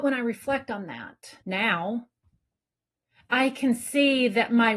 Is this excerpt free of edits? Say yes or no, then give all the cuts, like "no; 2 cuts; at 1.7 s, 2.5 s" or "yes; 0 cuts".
no; 1 cut; at 1.4 s